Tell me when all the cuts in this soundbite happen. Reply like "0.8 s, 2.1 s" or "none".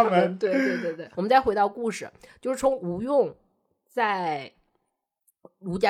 1.1 s